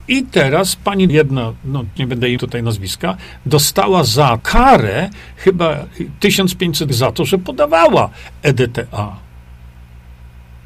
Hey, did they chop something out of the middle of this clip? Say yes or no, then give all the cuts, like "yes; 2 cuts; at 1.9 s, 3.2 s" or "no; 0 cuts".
yes; 5 cuts; at 1.1 s, 2.0 s, 2.4 s, 4.4 s, 6.9 s